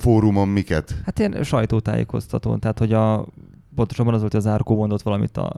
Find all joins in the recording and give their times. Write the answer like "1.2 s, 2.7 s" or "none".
none